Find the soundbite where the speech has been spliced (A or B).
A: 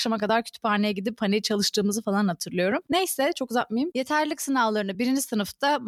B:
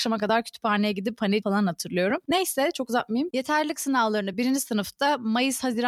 B